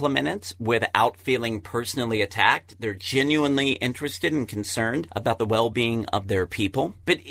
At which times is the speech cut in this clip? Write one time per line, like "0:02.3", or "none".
none